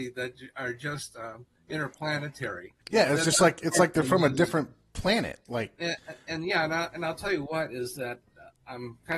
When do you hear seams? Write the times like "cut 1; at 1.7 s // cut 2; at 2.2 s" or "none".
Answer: cut 1; at 2.8 s